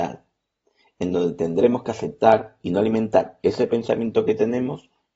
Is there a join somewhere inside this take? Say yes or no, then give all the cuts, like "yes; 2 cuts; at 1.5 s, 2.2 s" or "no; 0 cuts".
no; 0 cuts